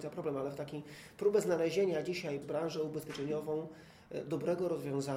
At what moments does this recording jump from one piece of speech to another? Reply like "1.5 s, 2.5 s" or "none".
2.4 s